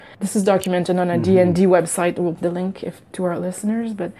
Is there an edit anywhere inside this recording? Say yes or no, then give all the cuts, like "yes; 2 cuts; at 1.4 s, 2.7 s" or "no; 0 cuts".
yes; 2 cuts; at 2.3 s, 3.1 s